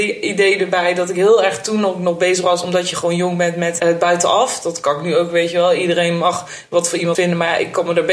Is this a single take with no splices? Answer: no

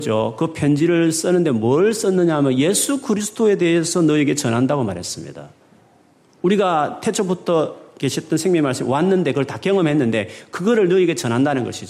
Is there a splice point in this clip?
no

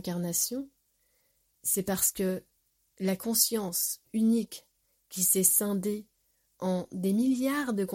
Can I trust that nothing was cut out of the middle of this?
yes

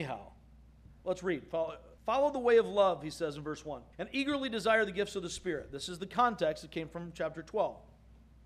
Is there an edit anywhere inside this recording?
yes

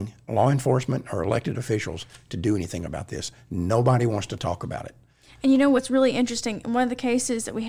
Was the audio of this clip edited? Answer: no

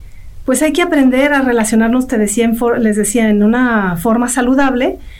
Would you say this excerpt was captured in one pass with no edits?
yes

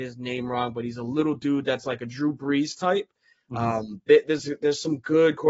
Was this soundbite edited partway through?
no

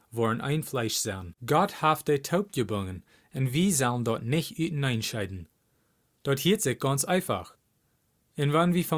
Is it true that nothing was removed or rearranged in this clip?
no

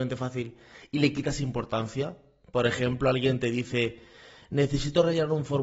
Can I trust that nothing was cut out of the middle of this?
yes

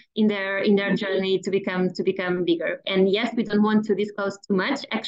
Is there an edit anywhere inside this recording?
no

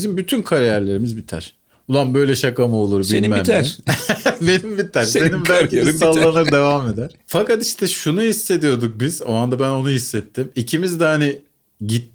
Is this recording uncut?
no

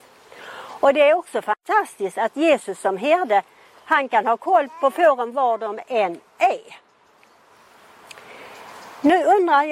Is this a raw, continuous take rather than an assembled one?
yes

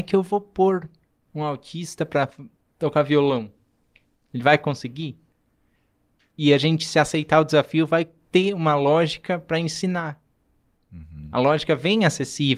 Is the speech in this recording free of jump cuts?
yes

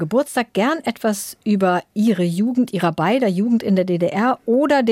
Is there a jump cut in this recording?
no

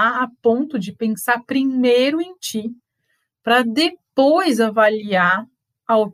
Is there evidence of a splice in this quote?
no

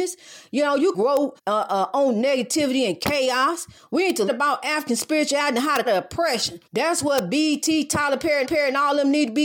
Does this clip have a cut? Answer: yes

